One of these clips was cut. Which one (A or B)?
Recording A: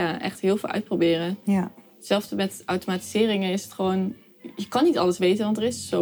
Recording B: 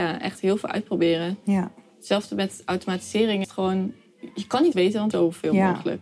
B